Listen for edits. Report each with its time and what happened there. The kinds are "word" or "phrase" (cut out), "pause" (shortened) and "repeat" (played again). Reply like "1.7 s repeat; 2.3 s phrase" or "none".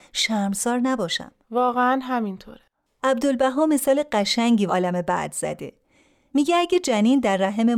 4.7 s word